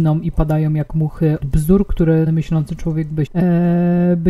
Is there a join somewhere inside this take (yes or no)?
yes